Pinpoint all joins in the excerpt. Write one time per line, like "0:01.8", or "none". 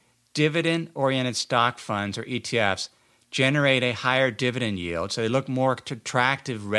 none